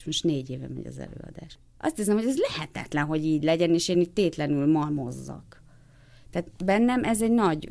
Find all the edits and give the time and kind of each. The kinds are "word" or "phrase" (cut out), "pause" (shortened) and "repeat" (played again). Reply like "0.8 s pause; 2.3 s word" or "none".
none